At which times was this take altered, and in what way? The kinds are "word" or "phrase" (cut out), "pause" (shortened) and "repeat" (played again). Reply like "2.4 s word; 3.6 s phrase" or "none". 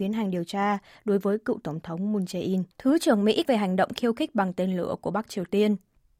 2.7 s pause; 3.4 s phrase